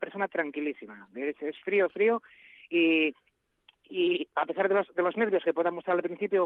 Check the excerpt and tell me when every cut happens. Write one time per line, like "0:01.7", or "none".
none